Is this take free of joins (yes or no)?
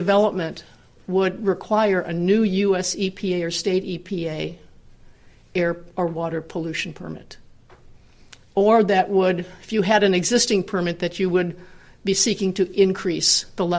yes